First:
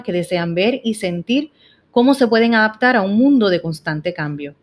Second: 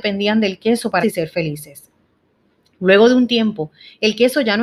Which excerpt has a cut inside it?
second; 1 cut; at 1.0 s

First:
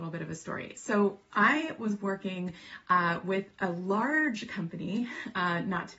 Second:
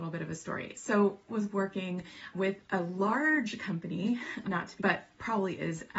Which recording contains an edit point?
second; 4 cuts; at 1.3 s, 2.3 s, 4.4 s, 4.8 s

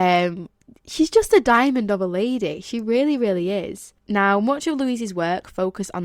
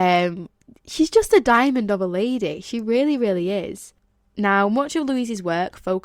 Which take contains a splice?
first; 1 cut; at 4.0 s

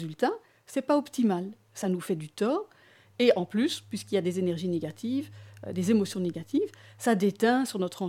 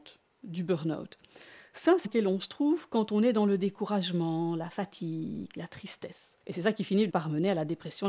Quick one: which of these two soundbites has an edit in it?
second; 3 cuts; at 2.0 s, 6.4 s, 7.1 s

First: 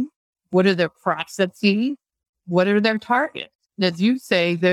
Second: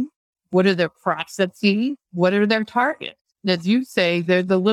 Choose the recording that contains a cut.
second; 1 cut; at 2.0 s

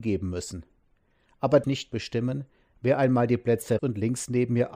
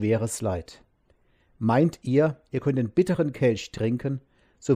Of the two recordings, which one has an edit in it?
first; 2 cuts; at 1.6 s, 3.8 s

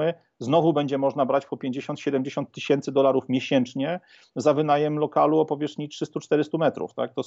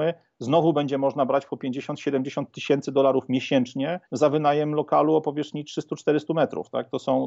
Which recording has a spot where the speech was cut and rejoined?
second; 1 cut; at 4.1 s

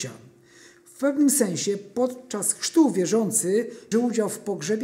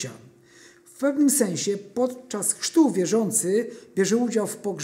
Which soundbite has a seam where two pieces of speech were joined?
first; 1 cut; at 3.9 s

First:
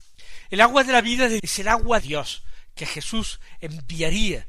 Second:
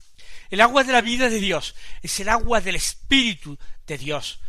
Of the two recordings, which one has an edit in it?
first; 2 cuts; at 1.4 s, 2.0 s

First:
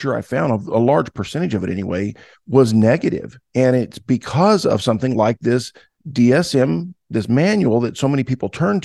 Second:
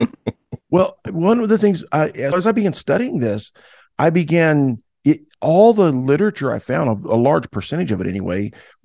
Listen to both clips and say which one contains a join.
second; 1 cut; at 2.3 s

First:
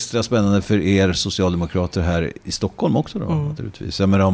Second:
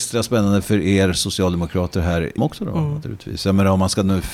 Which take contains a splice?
second; 1 cut; at 2.4 s

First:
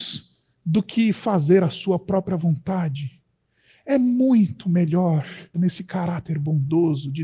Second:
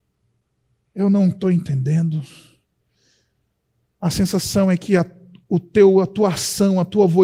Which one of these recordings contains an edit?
first; 1 cut; at 5.5 s

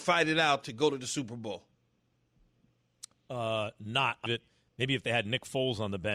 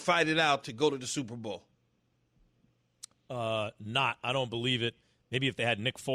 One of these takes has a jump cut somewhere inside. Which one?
first; 1 cut; at 4.3 s

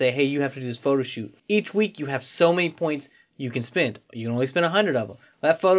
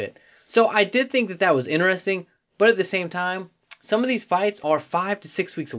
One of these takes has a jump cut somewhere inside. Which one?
first; 1 cut; at 1.4 s

